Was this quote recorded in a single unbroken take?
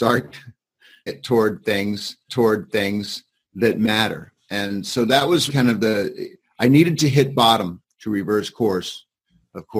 no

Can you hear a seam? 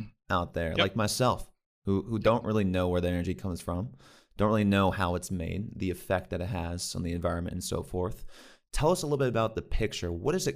no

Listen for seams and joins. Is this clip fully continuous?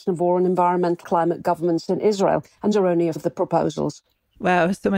no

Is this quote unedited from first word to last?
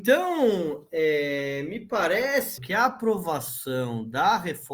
no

